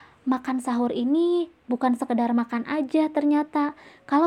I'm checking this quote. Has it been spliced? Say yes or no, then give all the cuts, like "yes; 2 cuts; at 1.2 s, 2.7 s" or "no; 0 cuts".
no; 0 cuts